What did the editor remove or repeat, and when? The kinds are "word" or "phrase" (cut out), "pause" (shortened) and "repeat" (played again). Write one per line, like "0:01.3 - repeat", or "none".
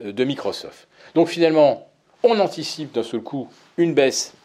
none